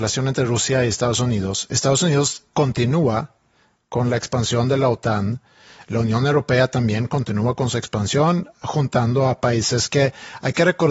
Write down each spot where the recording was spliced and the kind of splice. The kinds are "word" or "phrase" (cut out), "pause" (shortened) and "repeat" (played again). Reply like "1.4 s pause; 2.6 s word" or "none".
2.5 s pause